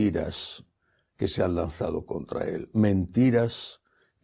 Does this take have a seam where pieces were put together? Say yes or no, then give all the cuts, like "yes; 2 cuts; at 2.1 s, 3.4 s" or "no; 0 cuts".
no; 0 cuts